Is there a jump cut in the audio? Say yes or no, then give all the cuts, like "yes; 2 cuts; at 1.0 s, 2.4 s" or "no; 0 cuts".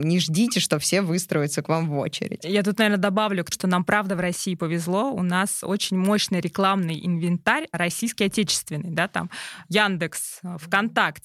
yes; 1 cut; at 3.5 s